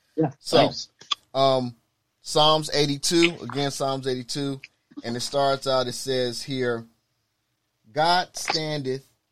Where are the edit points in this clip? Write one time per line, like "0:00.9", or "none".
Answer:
none

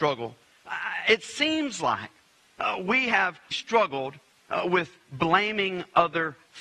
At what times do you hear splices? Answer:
0:03.5

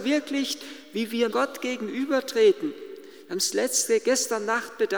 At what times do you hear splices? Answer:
0:01.3

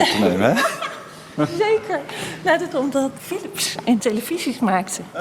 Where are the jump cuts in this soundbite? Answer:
0:02.7
0:03.2
0:04.0

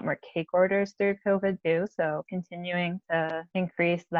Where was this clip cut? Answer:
0:02.3

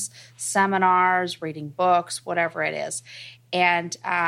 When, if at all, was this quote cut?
none

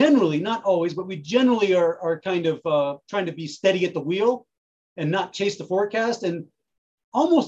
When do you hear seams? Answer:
none

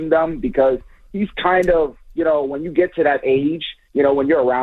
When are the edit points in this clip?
none

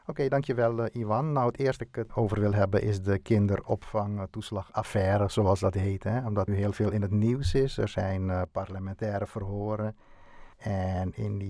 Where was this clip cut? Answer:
0:01.8
0:06.5
0:10.5

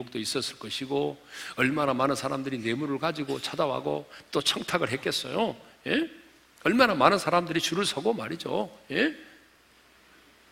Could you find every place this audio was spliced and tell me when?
none

